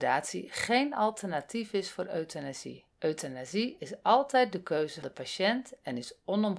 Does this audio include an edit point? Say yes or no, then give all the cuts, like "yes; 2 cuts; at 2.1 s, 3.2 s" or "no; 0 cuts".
yes; 2 cuts; at 2.9 s, 5.0 s